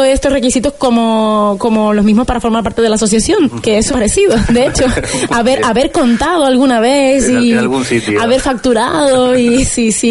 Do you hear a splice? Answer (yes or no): yes